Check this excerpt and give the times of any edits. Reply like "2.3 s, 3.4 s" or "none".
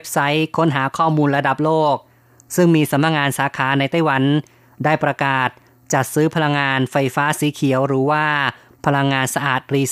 none

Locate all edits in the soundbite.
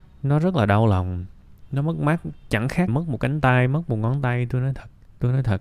2.9 s

